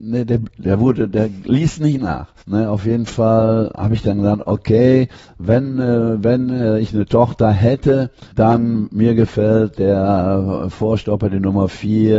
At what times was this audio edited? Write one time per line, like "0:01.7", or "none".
0:02.4
0:08.3